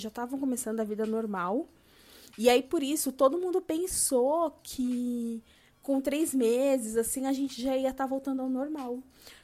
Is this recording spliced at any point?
no; 0 cuts

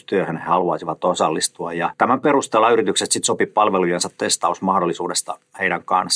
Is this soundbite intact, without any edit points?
yes; 0 cuts

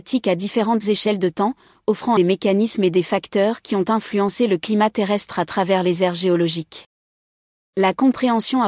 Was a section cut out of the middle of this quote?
yes; 1 cut; at 2.2 s

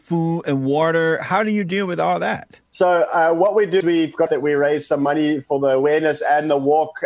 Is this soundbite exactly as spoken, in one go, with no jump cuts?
no; 3 cuts; at 2.7 s, 3.8 s, 4.3 s

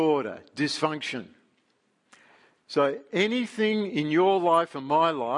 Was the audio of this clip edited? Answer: no; 0 cuts

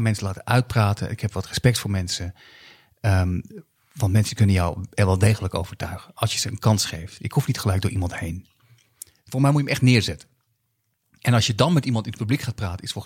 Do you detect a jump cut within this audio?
no; 0 cuts

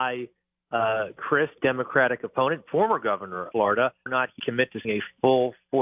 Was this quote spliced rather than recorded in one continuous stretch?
yes; 6 cuts; at 1.2 s, 1.6 s, 3.5 s, 4.1 s, 4.4 s, 4.8 s

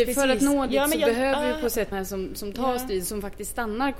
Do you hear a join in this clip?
yes; 1 cut; at 1.9 s

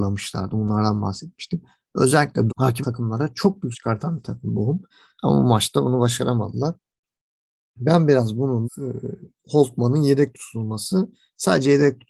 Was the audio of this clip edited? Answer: yes; 5 cuts; at 2.5 s, 2.8 s, 3.7 s, 4.9 s, 8.6 s

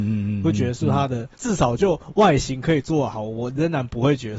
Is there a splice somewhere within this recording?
yes; 1 cut; at 1.3 s

